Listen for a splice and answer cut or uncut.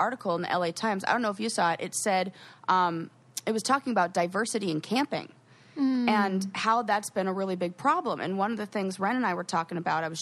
uncut